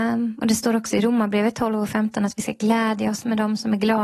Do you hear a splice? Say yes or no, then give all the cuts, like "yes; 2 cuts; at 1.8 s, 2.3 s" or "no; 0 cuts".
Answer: no; 0 cuts